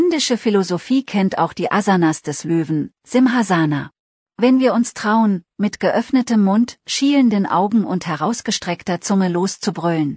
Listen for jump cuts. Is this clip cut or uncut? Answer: cut